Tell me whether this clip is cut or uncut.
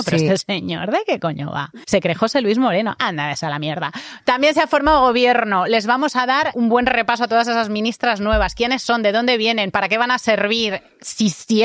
cut